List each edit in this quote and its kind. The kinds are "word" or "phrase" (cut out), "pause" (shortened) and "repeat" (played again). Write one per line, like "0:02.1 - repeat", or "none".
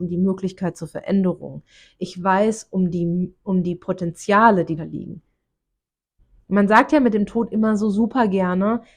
0:04.8 - word